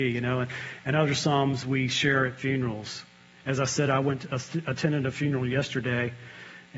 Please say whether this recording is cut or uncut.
uncut